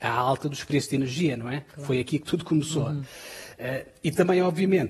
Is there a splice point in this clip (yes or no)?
no